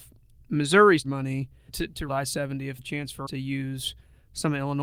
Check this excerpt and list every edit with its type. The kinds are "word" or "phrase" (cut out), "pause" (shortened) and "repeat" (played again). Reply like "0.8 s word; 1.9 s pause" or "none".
1.0 s word; 1.7 s word; 2.1 s word; 2.8 s word; 3.3 s word